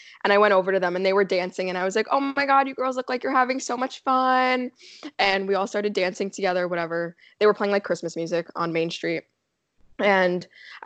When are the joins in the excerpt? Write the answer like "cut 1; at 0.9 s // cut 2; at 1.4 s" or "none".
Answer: none